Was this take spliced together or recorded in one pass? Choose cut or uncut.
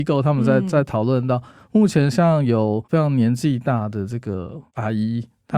uncut